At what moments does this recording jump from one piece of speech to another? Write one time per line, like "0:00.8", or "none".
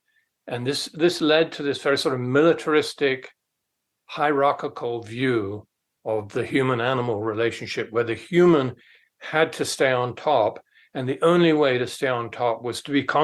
none